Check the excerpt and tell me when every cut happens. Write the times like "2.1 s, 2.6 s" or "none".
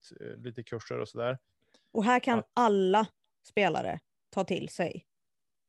none